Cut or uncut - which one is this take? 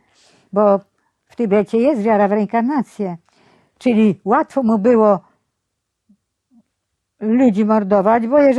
uncut